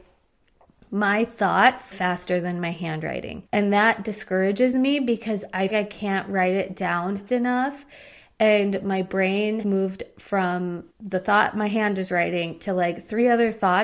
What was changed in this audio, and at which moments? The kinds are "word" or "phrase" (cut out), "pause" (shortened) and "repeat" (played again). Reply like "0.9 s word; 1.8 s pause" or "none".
1.9 s phrase; 3.5 s pause; 5.7 s phrase; 7.3 s word; 9.6 s word; 10.9 s pause